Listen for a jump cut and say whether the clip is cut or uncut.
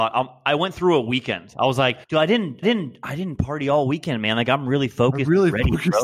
cut